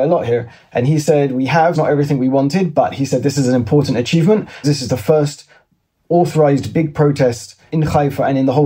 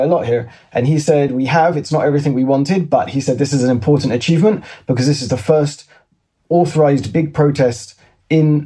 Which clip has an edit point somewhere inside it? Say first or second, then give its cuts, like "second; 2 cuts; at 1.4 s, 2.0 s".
first; 3 cuts; at 1.7 s, 4.6 s, 7.7 s